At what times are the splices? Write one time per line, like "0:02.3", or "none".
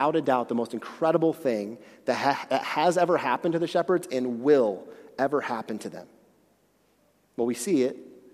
none

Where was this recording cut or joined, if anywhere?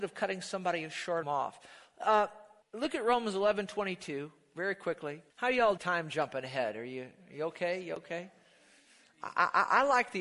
0:01.2
0:02.6
0:05.3
0:05.8

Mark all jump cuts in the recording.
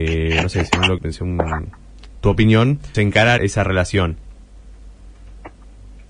0:01.0
0:02.1
0:02.9
0:03.4

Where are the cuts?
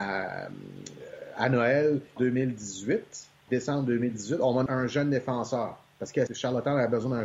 0:02.2
0:03.5
0:04.7
0:06.3

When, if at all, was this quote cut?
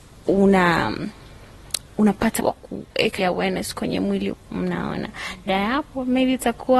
0:02.4
0:03.2
0:04.3
0:05.5

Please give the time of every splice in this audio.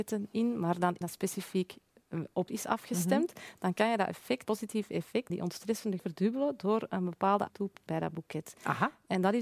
0:01.0
0:02.5
0:04.4
0:05.3
0:06.0
0:07.5
0:07.9

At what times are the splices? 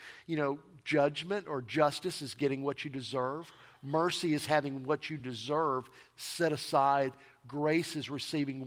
none

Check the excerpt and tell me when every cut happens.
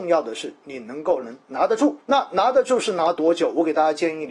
0:01.4
0:02.0

